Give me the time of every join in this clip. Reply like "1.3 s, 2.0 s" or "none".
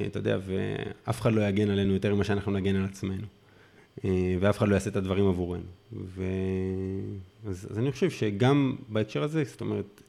none